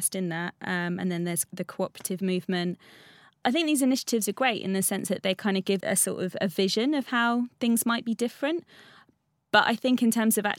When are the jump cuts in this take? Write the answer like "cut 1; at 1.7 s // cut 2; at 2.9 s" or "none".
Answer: cut 1; at 5.8 s